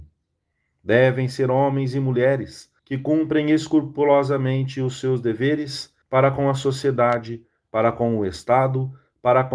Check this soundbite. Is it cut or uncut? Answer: cut